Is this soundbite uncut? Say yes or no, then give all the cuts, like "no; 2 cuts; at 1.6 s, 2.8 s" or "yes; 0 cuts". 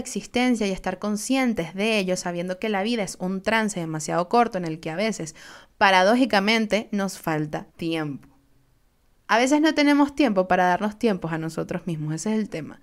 no; 1 cut; at 7.7 s